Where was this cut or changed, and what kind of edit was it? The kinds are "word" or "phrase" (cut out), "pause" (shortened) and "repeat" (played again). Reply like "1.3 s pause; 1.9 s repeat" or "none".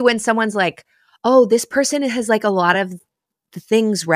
none